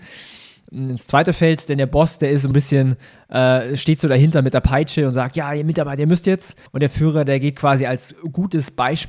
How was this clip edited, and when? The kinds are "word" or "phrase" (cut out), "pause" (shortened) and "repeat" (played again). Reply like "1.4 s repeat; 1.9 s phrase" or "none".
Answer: 2.5 s word; 6.7 s pause